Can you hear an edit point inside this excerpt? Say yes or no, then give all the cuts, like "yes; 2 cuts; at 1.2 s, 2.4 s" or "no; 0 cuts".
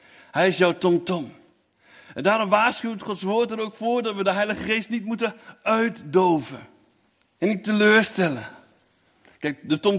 yes; 1 cut; at 7.1 s